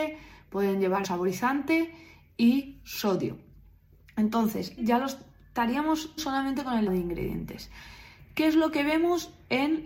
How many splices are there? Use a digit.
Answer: 4